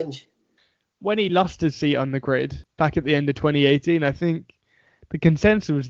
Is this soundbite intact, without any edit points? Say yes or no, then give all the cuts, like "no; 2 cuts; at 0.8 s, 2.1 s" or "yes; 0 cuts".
yes; 0 cuts